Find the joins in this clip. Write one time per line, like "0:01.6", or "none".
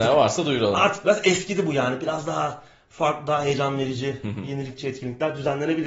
none